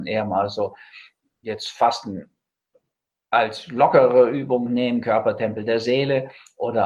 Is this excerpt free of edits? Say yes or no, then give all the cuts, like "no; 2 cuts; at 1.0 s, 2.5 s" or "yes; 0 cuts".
yes; 0 cuts